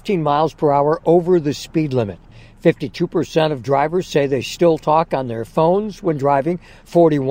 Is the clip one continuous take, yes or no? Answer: yes